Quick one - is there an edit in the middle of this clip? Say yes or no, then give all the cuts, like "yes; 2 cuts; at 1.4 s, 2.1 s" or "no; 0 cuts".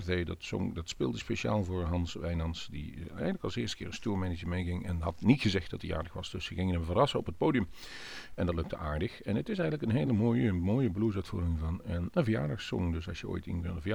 no; 0 cuts